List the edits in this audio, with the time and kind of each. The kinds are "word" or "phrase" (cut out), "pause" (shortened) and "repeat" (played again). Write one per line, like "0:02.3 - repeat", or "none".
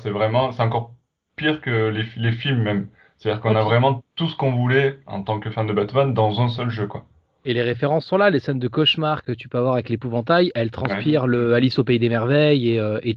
none